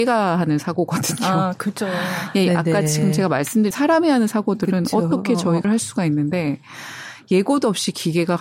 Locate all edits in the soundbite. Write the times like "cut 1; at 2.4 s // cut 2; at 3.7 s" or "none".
cut 1; at 3.7 s // cut 2; at 5.6 s